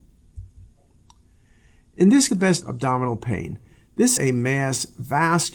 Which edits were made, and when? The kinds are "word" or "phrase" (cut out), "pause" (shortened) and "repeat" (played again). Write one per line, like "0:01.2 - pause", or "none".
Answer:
0:02.3 - phrase
0:02.6 - word
0:04.2 - word